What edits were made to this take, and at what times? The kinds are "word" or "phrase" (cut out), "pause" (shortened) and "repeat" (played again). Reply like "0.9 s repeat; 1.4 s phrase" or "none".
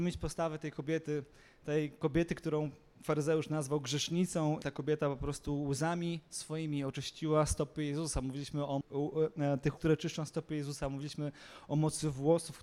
4.6 s word; 8.8 s word; 9.8 s word